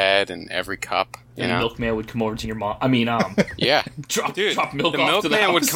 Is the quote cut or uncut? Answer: cut